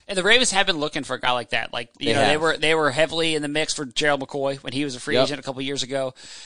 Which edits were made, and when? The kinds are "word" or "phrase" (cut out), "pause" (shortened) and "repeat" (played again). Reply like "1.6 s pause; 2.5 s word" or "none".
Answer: none

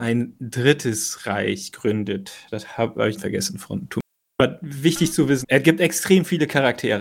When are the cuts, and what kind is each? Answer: 3.2 s word; 4.1 s pause; 5.4 s word

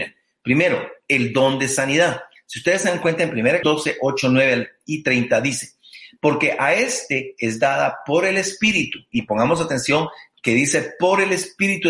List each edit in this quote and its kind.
3.6 s word

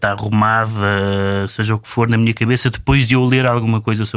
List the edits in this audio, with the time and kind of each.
none

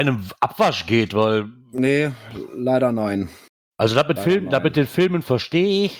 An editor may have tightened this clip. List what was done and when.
3.5 s pause; 4.2 s word

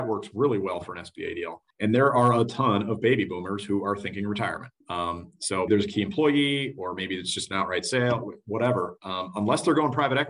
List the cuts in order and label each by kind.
1.7 s pause; 4.8 s pause; 5.7 s word

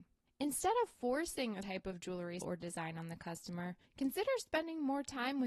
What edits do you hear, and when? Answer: 1.6 s word; 2.4 s word; 3.8 s pause

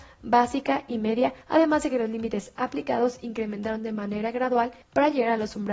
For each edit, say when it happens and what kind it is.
1.4 s pause; 4.8 s pause

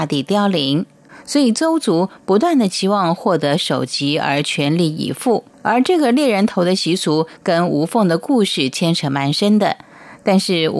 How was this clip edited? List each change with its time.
5.5 s pause

